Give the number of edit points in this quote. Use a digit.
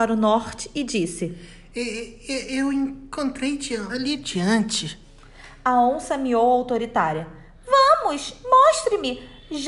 1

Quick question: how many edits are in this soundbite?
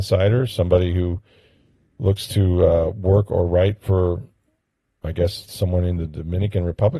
0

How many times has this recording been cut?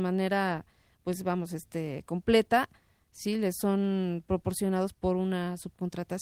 1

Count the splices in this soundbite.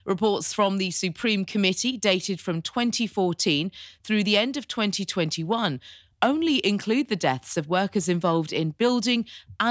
0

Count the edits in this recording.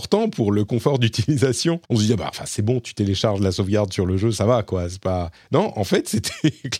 1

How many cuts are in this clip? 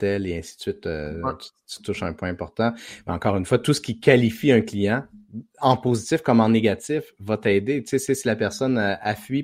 1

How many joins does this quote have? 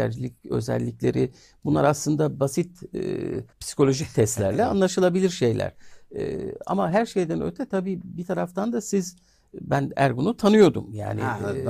1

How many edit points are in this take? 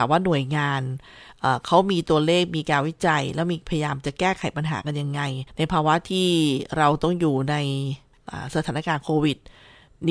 1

